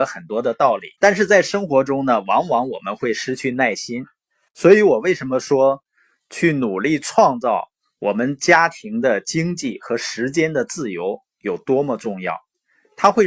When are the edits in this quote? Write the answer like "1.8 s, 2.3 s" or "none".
0.9 s